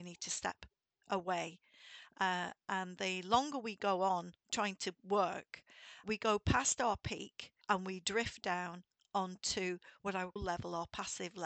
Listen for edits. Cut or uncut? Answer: cut